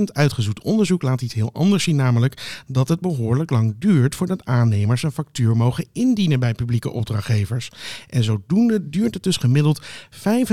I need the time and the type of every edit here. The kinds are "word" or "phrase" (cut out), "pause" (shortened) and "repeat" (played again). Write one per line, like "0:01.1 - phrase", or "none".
none